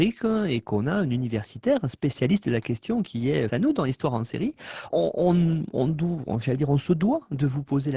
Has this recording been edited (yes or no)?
yes